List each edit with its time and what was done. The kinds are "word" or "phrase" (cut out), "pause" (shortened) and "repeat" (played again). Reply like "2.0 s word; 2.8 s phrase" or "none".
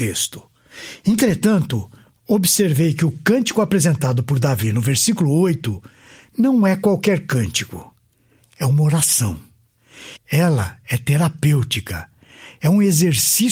none